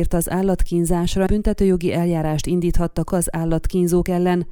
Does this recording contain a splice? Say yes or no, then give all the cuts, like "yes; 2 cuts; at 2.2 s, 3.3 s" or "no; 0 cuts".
yes; 2 cuts; at 1.3 s, 3.1 s